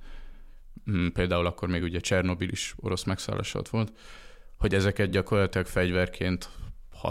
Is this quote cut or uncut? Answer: uncut